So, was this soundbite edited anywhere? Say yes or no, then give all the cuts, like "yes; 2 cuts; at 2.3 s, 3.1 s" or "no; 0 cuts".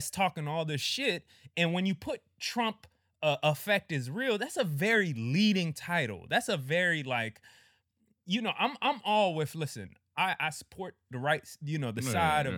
no; 0 cuts